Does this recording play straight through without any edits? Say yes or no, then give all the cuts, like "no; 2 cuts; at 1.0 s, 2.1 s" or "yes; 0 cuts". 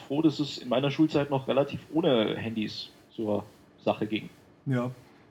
yes; 0 cuts